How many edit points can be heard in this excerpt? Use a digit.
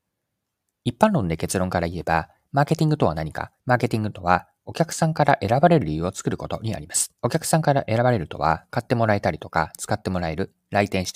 2